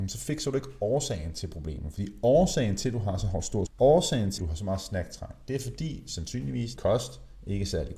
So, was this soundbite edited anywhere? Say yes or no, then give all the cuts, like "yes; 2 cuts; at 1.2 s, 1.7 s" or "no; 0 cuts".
yes; 3 cuts; at 3.7 s, 4.4 s, 6.8 s